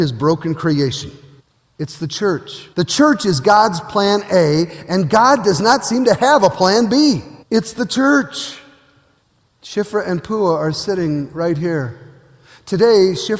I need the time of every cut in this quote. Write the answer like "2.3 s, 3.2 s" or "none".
1.4 s, 2.7 s, 7.4 s, 9.2 s